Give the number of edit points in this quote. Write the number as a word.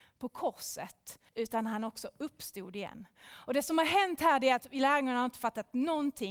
one